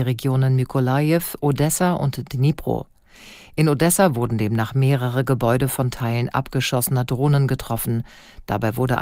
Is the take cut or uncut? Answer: uncut